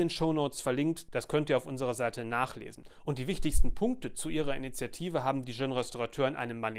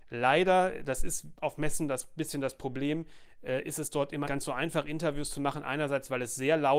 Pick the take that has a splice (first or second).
second